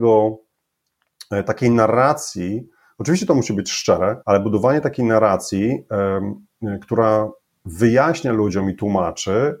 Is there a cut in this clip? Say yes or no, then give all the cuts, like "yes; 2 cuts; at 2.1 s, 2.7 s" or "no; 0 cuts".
yes; 1 cut; at 4.2 s